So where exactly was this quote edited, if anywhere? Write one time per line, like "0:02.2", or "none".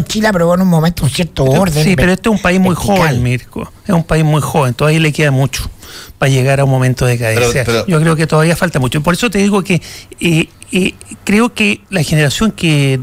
0:11.8